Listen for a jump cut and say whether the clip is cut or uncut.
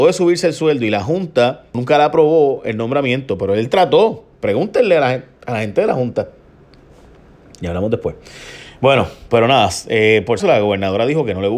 cut